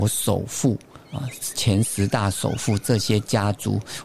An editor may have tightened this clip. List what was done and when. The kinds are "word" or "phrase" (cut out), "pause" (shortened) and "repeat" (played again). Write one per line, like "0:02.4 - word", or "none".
0:01.0 - pause